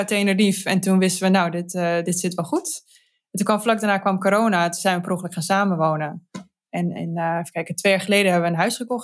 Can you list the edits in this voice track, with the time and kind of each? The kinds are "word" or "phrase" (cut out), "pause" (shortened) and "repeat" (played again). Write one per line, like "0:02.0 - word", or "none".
none